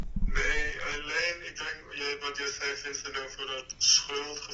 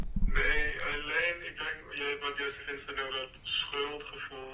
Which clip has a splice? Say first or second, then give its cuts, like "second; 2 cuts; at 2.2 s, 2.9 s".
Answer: second; 2 cuts; at 2.6 s, 3.1 s